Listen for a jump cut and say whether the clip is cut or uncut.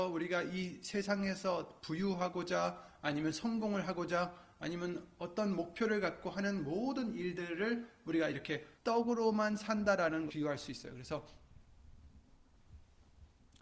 cut